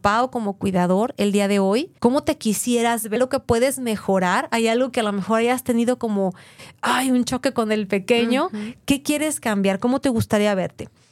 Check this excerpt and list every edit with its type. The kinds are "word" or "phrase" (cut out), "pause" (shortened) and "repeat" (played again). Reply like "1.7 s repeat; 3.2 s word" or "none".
2.0 s pause; 3.2 s word